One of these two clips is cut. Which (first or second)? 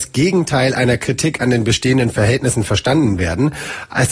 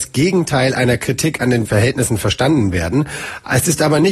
second